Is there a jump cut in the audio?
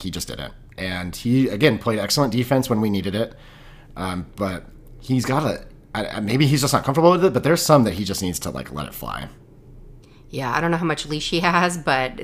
no; 0 cuts

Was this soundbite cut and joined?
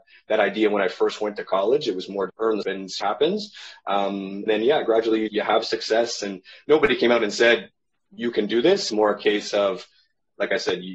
yes; 6 cuts; at 2.3 s, 2.6 s, 3.0 s, 4.5 s, 5.3 s, 8.9 s

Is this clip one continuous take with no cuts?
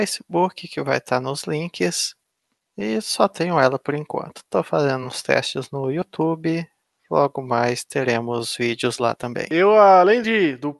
yes; 0 cuts

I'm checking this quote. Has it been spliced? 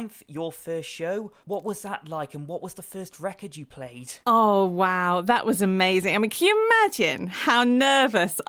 yes; 2 cuts; at 1.4 s, 4.2 s

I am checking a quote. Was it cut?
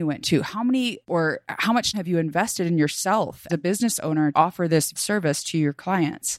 yes; 5 cuts; at 1.1 s, 1.9 s, 3.5 s, 4.3 s, 5.0 s

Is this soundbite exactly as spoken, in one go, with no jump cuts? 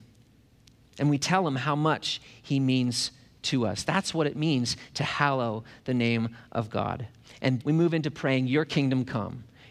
no; 1 cut; at 7.6 s

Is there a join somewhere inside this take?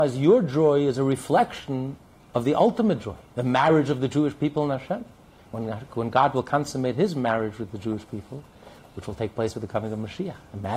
no; 0 cuts

